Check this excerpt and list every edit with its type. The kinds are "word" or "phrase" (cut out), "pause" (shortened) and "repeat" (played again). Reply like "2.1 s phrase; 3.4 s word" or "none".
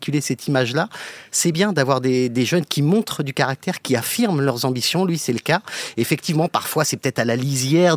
none